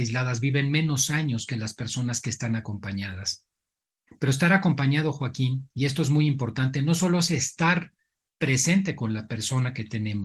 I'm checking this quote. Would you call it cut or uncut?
uncut